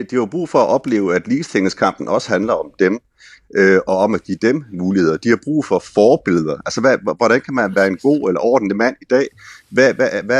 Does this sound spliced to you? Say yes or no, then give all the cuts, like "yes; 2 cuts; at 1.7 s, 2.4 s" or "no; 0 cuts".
no; 0 cuts